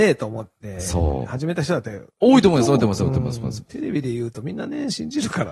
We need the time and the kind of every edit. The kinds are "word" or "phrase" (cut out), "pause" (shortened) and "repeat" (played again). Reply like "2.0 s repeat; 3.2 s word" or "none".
2.1 s pause